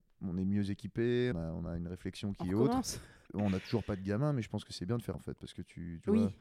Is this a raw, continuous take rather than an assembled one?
no; 3 cuts; at 1.3 s, 3.3 s, 5.1 s

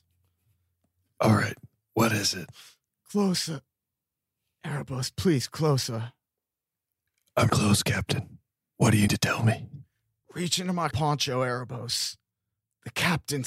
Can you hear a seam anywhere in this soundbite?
yes; 3 cuts; at 7.5 s, 9.1 s, 10.9 s

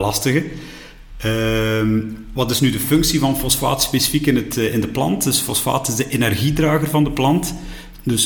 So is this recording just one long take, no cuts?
yes; 0 cuts

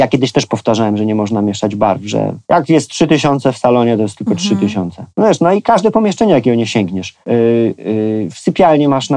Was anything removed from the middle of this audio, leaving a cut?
yes; 3 cuts; at 2.4 s, 5.1 s, 7.2 s

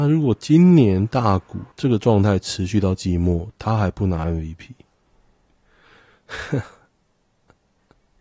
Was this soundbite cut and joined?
yes; 1 cut; at 1.7 s

